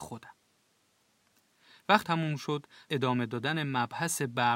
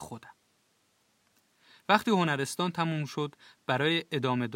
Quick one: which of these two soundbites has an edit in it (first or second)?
first